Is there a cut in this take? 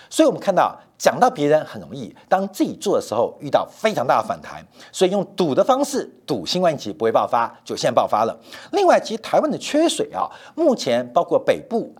no; 0 cuts

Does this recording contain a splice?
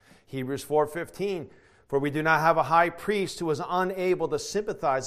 no; 0 cuts

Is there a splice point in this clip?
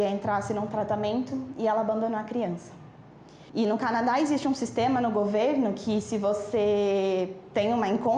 yes; 1 cut; at 3.5 s

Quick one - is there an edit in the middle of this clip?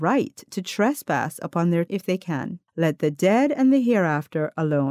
yes; 2 cuts; at 1.9 s, 2.7 s

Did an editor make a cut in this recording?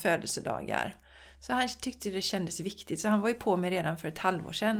no; 0 cuts

